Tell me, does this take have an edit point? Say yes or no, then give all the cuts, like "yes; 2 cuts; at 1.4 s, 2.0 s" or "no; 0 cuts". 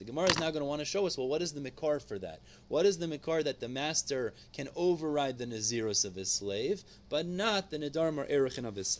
no; 0 cuts